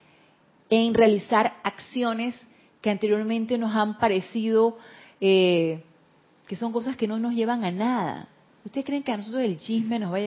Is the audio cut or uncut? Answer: uncut